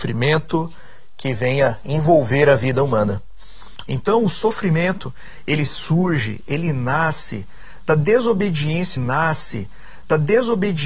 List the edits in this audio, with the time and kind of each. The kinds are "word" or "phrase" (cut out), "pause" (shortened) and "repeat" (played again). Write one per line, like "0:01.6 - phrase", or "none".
0:09.0 - repeat